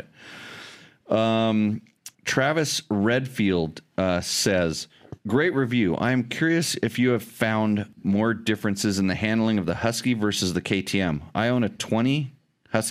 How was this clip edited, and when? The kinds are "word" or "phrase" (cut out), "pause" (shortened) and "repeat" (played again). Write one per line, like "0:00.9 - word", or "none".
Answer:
0:02.1 - pause
0:05.2 - pause